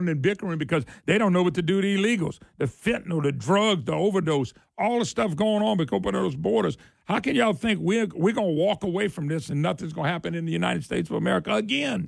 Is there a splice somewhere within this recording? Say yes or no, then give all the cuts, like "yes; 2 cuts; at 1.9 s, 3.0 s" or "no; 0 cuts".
no; 0 cuts